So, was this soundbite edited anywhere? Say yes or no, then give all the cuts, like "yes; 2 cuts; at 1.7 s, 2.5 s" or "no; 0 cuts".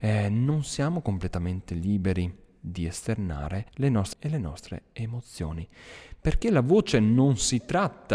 yes; 2 cuts; at 3.7 s, 4.1 s